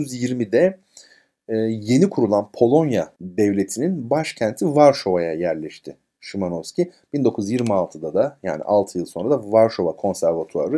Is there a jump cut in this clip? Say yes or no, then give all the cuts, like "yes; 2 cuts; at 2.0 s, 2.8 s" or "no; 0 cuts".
yes; 1 cut; at 3.2 s